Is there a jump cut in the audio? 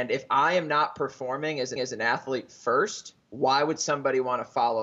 yes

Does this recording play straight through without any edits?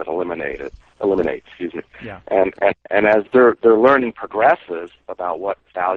yes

